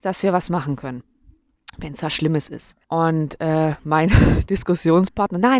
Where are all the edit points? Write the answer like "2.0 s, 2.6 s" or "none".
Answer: 2.8 s